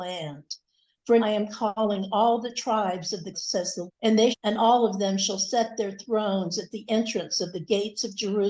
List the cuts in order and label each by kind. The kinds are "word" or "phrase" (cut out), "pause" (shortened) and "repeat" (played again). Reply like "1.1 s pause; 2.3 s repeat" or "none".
1.2 s word; 3.3 s phrase; 3.9 s word; 4.3 s phrase